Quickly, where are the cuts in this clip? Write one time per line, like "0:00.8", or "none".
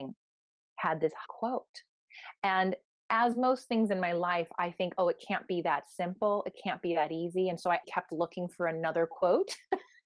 0:01.3
0:07.8